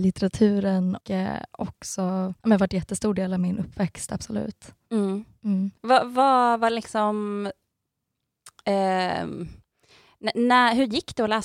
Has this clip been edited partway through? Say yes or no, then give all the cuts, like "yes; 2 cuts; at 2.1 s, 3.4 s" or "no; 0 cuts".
yes; 3 cuts; at 1.0 s, 2.4 s, 5.8 s